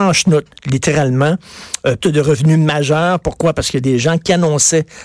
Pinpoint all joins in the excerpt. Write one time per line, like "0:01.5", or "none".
0:02.0